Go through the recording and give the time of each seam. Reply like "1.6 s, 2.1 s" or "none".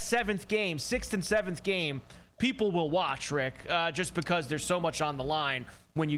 none